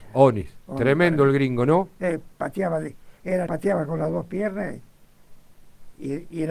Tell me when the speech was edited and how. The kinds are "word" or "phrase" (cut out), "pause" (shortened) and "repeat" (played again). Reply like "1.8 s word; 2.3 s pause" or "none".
3.5 s word